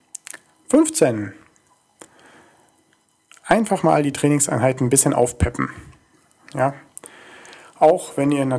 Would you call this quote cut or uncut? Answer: uncut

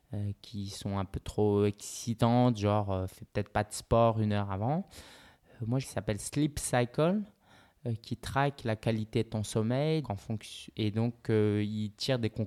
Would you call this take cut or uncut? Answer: cut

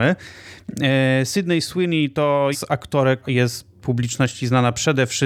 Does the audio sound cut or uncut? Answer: cut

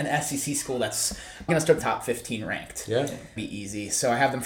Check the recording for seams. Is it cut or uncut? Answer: cut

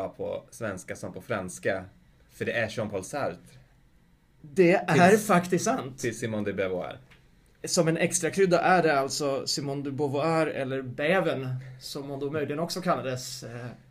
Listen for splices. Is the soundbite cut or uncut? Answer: uncut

